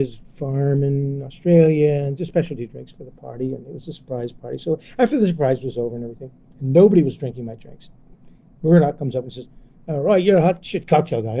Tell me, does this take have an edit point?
no; 0 cuts

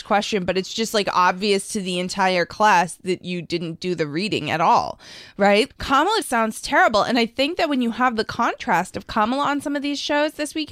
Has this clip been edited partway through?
yes; 2 cuts; at 5.7 s, 6.2 s

